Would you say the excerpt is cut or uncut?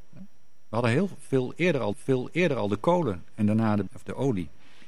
cut